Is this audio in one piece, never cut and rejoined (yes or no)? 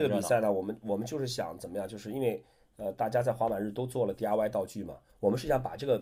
yes